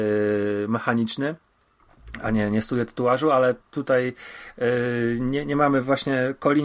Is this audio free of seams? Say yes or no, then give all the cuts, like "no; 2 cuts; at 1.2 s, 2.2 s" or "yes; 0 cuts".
no; 1 cut; at 3.6 s